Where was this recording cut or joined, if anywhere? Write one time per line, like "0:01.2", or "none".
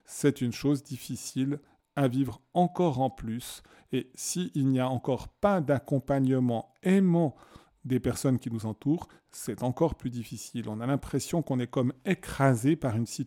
none